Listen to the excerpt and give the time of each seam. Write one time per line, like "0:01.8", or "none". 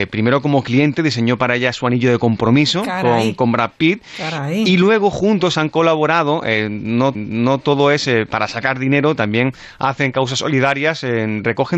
0:07.1